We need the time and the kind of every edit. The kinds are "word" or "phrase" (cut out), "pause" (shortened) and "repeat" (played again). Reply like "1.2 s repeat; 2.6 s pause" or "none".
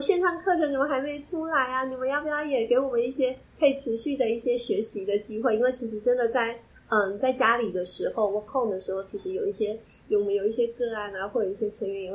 8.5 s word